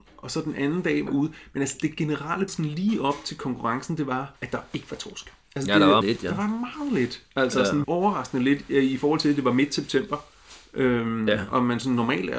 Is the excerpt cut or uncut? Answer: cut